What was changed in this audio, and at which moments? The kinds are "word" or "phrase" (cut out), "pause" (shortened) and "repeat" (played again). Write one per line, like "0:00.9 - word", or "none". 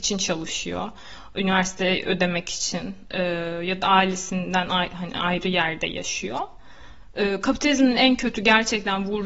none